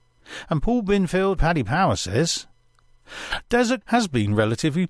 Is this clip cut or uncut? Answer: cut